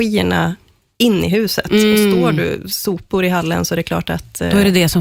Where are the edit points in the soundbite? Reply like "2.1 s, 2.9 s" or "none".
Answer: none